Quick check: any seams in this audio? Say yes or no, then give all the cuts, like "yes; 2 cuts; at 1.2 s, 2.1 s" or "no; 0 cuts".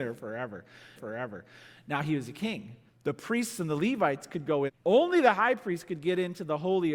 yes; 3 cuts; at 1.0 s, 2.9 s, 4.7 s